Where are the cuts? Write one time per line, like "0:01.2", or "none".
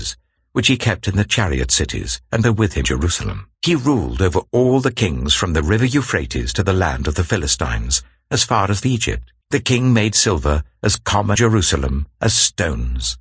0:02.4
0:02.8
0:03.5
0:08.8
0:09.4
0:11.4